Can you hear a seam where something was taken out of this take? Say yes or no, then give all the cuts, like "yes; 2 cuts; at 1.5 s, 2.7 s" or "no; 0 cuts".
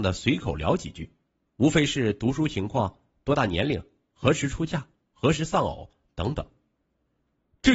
no; 0 cuts